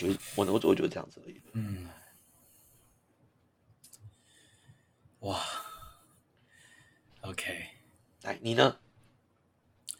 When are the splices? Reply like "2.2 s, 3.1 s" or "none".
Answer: none

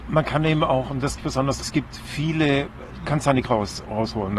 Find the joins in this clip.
1.2 s, 1.6 s, 3.0 s, 3.4 s

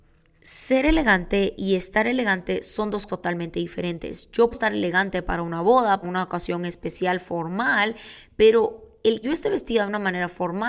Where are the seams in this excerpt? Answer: 3.1 s, 4.5 s, 6.0 s, 9.2 s

